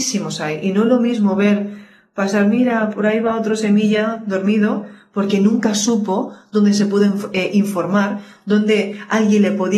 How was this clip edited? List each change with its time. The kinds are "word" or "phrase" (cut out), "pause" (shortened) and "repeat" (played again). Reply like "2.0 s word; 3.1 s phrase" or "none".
none